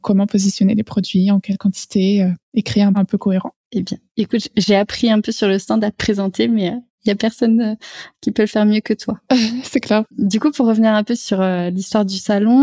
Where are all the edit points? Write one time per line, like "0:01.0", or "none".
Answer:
0:02.9
0:03.6